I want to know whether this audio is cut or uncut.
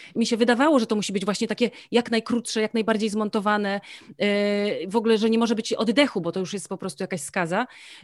uncut